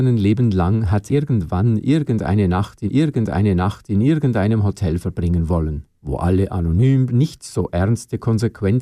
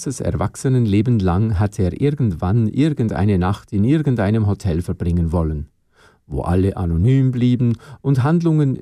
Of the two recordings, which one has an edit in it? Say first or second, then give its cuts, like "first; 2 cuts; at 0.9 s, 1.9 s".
first; 4 cuts; at 1.1 s, 2.9 s, 6.0 s, 7.1 s